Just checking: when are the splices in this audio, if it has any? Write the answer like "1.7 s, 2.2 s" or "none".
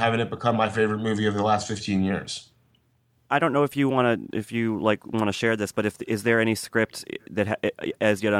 none